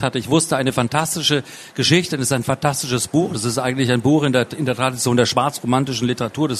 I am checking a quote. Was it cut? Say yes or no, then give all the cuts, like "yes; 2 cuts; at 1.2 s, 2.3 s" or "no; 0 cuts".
no; 0 cuts